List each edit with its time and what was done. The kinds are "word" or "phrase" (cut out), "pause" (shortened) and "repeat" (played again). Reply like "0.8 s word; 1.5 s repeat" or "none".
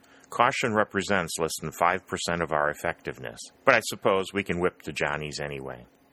3.5 s pause

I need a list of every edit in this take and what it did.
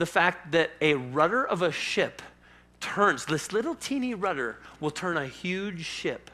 none

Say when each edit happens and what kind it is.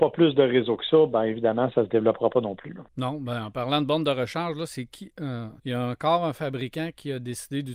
2.9 s pause; 5.6 s pause

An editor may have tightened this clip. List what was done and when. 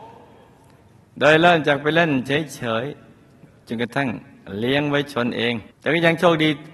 5.7 s pause

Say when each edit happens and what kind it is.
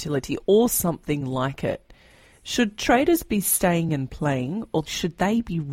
none

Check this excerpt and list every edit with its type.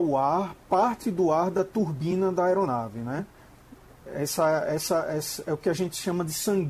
none

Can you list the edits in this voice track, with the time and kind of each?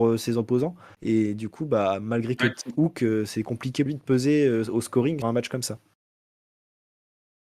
2.4 s word; 3.9 s word; 5.2 s word

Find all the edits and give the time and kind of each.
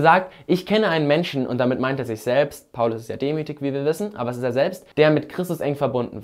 4.9 s pause

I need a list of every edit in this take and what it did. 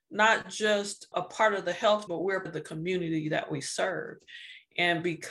1.1 s word; 2.1 s word; 2.5 s word

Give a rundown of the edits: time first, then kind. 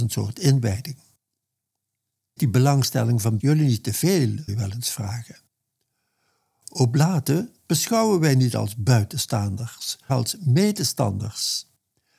2.4 s word; 3.4 s word; 4.5 s word; 10.1 s word

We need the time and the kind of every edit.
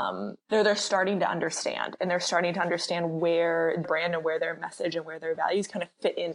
3.8 s word

